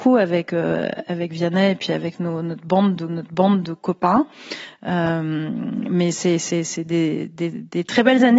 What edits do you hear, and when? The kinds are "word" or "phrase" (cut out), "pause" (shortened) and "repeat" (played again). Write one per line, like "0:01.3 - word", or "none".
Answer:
0:03.1 - repeat

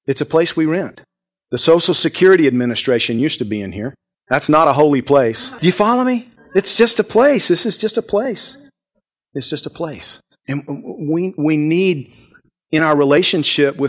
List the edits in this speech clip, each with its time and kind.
none

